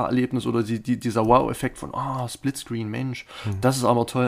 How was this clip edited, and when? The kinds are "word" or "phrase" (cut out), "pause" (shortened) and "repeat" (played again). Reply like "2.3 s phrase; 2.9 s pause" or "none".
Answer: none